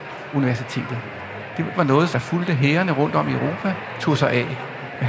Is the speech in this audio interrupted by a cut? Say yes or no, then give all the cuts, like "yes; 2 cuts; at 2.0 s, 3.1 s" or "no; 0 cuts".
yes; 2 cuts; at 1.7 s, 2.1 s